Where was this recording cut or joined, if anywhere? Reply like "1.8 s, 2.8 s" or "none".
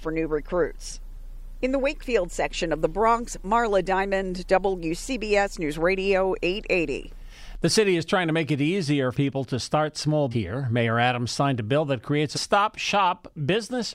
9.1 s, 10.3 s, 12.3 s